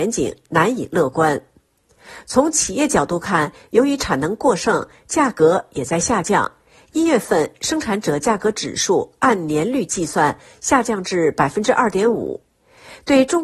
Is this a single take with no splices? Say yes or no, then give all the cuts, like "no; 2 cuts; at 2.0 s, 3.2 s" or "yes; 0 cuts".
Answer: yes; 0 cuts